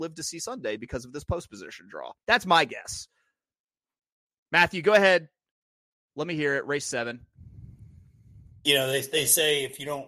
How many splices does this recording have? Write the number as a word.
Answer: one